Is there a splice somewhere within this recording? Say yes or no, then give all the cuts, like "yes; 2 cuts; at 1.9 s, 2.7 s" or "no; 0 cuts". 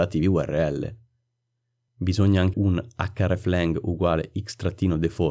yes; 1 cut; at 2.5 s